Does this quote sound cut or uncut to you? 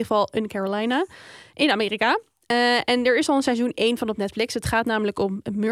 uncut